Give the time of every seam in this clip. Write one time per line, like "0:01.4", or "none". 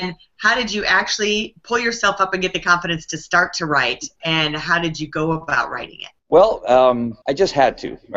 0:06.2
0:07.2